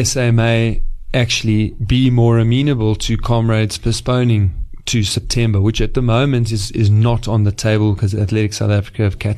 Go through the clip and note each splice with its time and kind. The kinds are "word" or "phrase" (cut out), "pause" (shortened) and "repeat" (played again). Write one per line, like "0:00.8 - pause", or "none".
none